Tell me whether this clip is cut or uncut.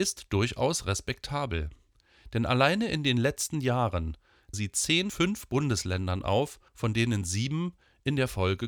cut